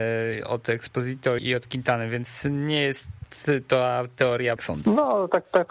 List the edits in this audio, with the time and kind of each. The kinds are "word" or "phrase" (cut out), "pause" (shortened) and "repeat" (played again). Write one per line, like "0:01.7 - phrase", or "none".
0:01.4 - word
0:04.6 - phrase